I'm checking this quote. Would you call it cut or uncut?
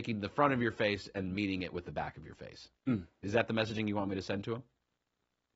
cut